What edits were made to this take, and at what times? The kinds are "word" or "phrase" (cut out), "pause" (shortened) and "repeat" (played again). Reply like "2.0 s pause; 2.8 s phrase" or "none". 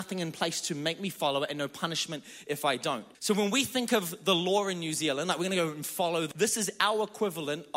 3.1 s pause; 6.3 s word